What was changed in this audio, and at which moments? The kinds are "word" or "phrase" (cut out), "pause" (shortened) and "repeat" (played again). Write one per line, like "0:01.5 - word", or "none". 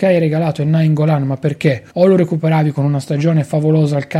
0:01.9 - pause